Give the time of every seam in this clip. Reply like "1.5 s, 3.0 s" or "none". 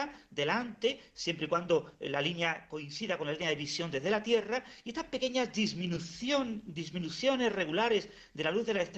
none